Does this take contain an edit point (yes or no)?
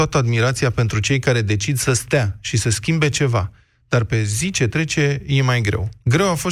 no